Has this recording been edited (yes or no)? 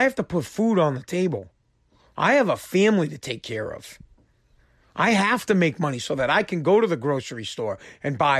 no